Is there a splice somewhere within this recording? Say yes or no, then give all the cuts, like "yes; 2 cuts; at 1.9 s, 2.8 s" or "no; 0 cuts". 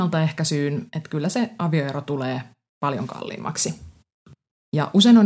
no; 0 cuts